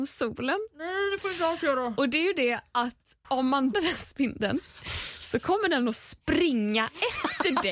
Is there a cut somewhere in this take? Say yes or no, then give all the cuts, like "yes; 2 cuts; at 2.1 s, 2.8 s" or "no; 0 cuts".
yes; 2 cuts; at 3.2 s, 3.7 s